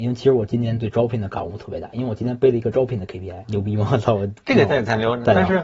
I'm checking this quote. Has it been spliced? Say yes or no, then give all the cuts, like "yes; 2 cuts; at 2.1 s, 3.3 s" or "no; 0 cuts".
yes; 1 cut; at 3.4 s